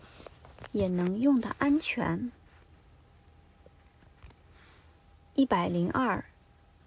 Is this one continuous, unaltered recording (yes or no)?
yes